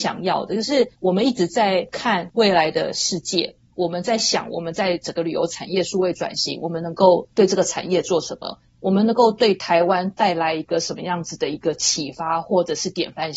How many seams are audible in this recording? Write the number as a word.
one